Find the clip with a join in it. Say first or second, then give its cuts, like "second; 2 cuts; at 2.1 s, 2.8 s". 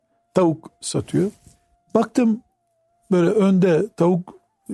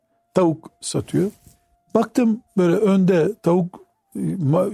second; 1 cut; at 2.5 s